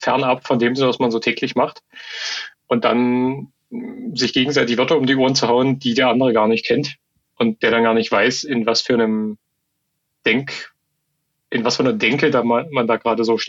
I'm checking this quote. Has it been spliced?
no; 0 cuts

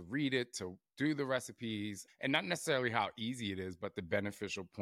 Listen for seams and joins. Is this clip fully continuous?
yes; 0 cuts

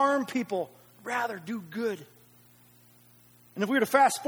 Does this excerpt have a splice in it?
yes; 1 cut; at 1.0 s

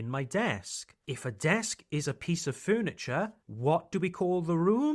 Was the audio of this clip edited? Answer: yes; 2 cuts; at 1.0 s, 3.4 s

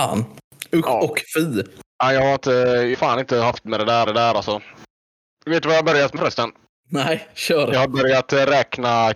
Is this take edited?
yes; 5 cuts; at 1.9 s, 2.9 s, 3.7 s, 4.1 s, 6.2 s

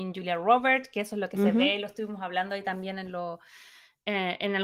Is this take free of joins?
yes; 0 cuts

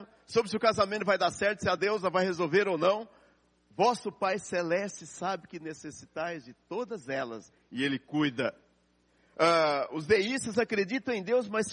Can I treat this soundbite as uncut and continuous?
yes; 0 cuts

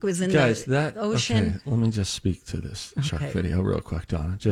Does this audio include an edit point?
no; 0 cuts

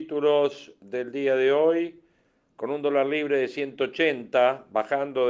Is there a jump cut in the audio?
no; 0 cuts

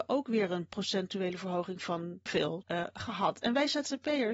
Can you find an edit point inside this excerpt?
yes; 2 cuts; at 2.3 s, 2.6 s

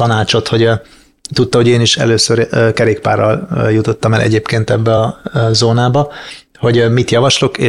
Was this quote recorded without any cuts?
yes; 0 cuts

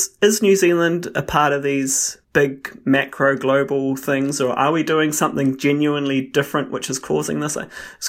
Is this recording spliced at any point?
yes; 1 cut; at 2.2 s

